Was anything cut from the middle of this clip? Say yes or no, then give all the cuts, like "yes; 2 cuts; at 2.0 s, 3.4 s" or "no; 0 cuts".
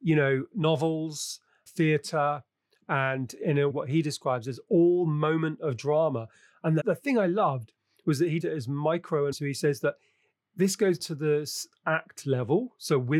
yes; 6 cuts; at 1.7 s, 3.7 s, 6.8 s, 8.4 s, 9.3 s, 11.0 s